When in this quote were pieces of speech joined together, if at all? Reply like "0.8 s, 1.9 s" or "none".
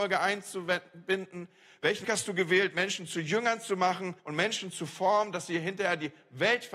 2.0 s, 4.2 s